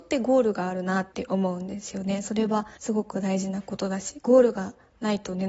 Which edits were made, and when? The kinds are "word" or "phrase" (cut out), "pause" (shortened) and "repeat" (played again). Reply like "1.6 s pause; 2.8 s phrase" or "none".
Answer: 1.1 s pause; 2.8 s pause